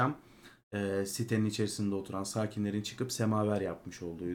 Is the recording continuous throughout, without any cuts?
yes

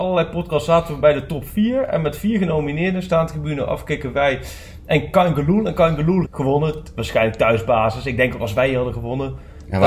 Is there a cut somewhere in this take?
yes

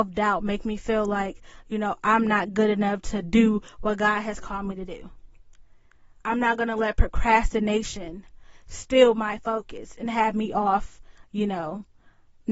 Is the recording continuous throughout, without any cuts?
no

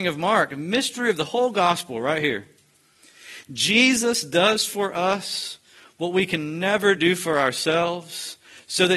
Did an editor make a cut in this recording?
no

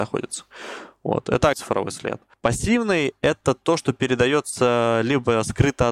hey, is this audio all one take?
no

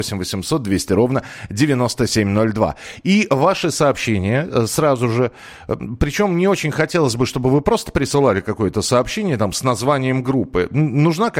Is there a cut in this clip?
no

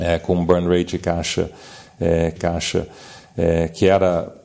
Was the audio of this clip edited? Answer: yes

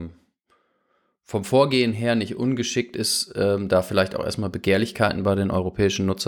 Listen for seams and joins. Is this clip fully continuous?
yes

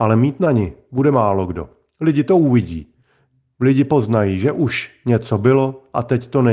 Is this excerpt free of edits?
yes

